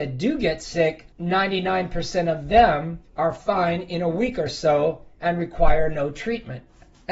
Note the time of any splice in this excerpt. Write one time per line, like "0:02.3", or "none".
0:01.1
0:03.1